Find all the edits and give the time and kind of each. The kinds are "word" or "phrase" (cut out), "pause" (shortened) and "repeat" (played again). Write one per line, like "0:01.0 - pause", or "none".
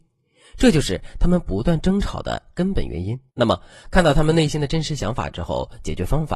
0:03.3 - pause